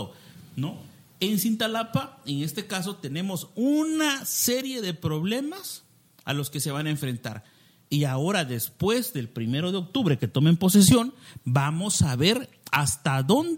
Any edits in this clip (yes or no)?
no